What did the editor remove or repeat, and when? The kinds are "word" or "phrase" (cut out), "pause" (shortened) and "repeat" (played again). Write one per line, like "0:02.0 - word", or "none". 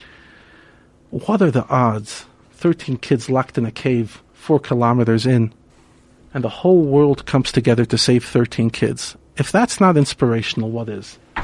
0:02.4 - pause
0:04.3 - pause
0:05.7 - pause